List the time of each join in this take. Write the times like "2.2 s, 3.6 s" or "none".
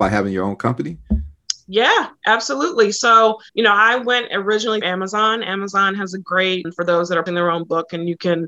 3.5 s, 4.8 s, 6.7 s, 7.3 s